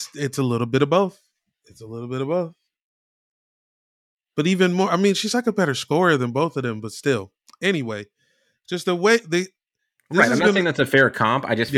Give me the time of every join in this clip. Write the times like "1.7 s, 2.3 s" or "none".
none